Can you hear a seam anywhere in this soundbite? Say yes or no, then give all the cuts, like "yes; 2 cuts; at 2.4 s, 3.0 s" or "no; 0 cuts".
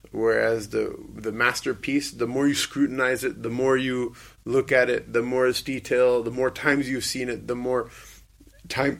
no; 0 cuts